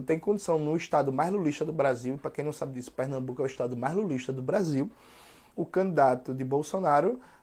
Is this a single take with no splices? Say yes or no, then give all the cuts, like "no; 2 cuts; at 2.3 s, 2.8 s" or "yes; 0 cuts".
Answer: yes; 0 cuts